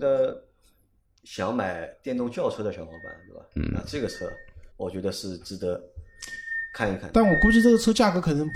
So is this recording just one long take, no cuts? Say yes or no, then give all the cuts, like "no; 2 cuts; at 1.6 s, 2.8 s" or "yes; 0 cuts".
no; 1 cut; at 4.7 s